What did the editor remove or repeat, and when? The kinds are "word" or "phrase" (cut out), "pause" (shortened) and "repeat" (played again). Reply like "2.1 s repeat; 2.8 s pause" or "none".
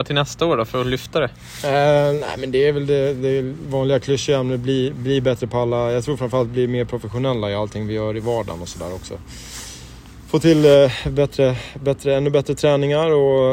none